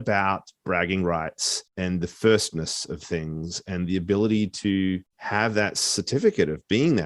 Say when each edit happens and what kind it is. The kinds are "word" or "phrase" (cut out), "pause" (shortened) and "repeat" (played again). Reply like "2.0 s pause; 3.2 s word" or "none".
1.7 s pause; 5.1 s pause